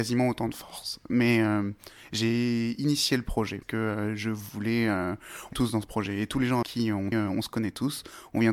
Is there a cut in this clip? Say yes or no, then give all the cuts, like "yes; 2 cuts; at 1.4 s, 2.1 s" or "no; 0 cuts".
yes; 4 cuts; at 3.6 s, 5.5 s, 6.6 s, 7.1 s